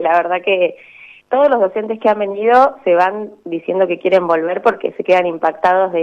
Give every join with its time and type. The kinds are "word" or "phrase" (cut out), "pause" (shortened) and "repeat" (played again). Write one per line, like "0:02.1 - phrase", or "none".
0:01.2 - word